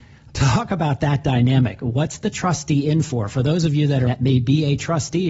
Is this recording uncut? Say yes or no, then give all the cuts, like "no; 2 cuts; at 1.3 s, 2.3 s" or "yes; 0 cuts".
no; 1 cut; at 4.1 s